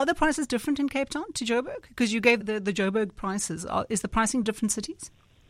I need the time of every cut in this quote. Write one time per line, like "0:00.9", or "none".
0:02.4
0:04.4